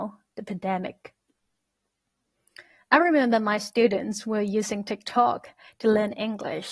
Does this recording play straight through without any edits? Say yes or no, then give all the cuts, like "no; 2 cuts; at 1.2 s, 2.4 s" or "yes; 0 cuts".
yes; 0 cuts